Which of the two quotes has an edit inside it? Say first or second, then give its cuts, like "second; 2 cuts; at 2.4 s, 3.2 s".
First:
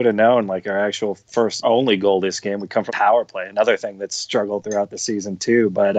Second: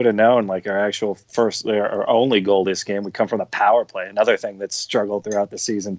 first; 2 cuts; at 1.6 s, 2.9 s